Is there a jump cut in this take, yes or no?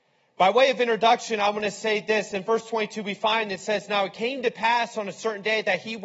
no